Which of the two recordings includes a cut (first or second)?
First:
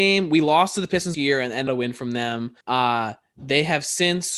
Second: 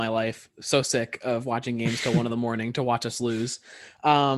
first